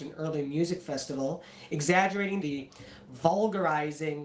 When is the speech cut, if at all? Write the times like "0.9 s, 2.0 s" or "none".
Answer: 2.4 s

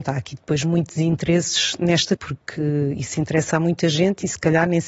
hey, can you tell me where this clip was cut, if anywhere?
2.2 s

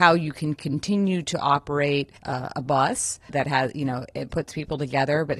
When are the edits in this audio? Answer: 2.2 s, 3.3 s

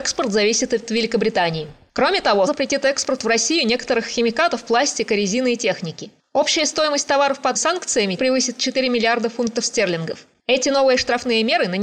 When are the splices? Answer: 2.5 s, 7.5 s, 8.2 s

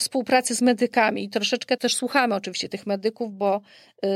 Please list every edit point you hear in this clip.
1.8 s

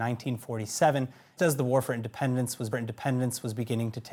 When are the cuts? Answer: 1.4 s, 2.7 s

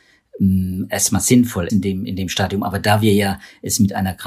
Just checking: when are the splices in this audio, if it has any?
1.7 s

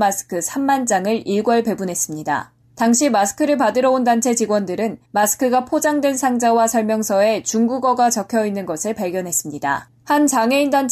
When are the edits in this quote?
2.6 s, 5.0 s, 10.0 s

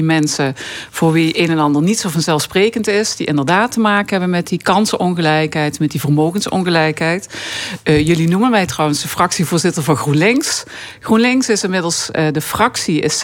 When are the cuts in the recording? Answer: none

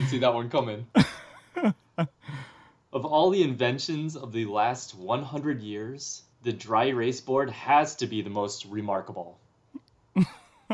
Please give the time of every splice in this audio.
0.9 s, 6.3 s

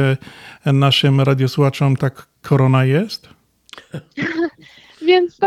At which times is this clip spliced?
2.0 s

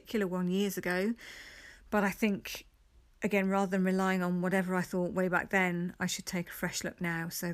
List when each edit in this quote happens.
none

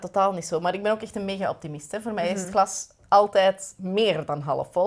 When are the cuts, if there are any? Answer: none

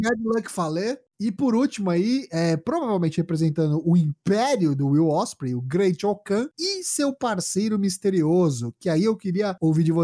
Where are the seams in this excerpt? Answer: none

